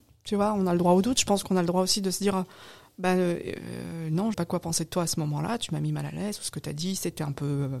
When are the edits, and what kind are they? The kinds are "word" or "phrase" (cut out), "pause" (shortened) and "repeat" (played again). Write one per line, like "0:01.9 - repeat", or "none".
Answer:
0:04.3 - word